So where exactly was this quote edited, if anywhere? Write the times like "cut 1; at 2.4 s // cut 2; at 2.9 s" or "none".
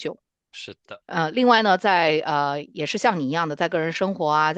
cut 1; at 1.0 s